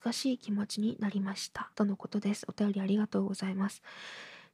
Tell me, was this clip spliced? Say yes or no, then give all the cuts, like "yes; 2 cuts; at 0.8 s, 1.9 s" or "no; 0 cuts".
yes; 1 cut; at 1.7 s